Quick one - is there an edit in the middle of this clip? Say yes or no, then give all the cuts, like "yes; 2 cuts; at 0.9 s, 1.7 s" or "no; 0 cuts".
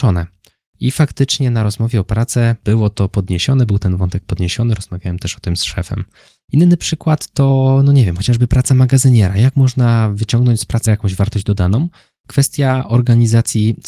yes; 1 cut; at 10.9 s